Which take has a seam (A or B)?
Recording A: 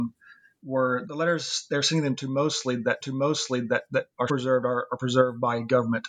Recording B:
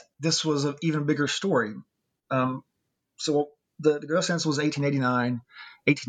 A